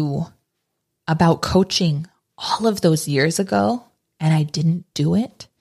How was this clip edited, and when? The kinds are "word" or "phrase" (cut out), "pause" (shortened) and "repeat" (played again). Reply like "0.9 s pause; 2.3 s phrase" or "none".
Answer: none